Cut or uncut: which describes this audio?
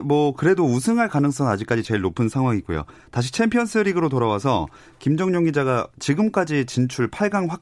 uncut